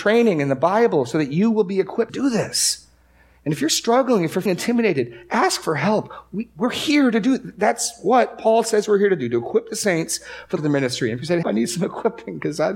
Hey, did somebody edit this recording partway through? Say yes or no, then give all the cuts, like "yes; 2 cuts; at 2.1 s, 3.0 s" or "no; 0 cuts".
yes; 4 cuts; at 2.1 s, 4.5 s, 10.6 s, 11.4 s